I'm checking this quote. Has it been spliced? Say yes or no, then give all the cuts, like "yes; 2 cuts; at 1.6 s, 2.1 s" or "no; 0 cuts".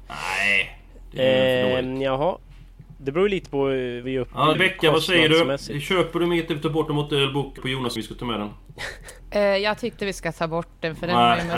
yes; 5 cuts; at 4.0 s, 4.5 s, 7.6 s, 8.0 s, 10.0 s